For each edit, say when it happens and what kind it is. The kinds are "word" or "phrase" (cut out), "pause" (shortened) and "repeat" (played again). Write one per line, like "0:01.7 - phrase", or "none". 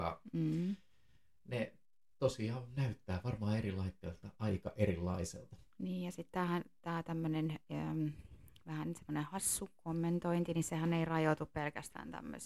0:04.3 - pause